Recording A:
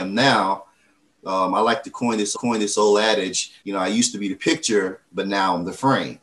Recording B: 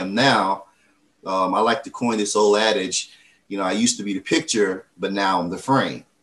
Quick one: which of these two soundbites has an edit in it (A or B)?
A